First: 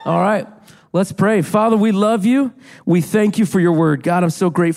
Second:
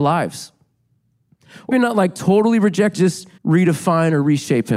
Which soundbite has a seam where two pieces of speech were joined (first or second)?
second